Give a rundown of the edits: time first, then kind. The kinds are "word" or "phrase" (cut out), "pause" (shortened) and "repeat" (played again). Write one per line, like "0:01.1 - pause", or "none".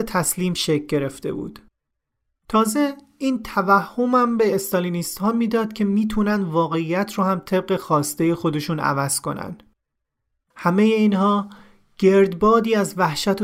none